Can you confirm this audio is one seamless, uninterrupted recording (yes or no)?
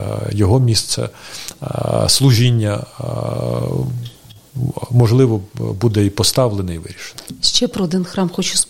yes